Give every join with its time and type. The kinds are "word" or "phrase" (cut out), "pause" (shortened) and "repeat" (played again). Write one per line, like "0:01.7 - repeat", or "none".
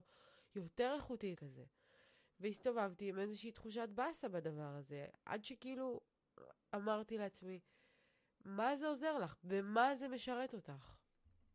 0:01.4 - word